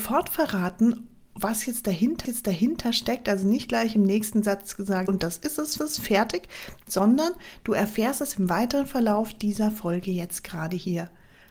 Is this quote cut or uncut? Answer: cut